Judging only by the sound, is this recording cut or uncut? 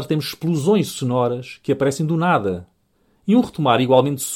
uncut